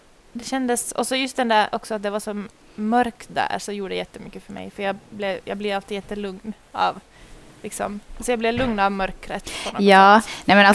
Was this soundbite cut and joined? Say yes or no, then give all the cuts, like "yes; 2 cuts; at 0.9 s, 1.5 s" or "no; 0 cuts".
no; 0 cuts